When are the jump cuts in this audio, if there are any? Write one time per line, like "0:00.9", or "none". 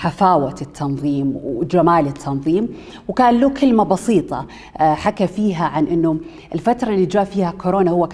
none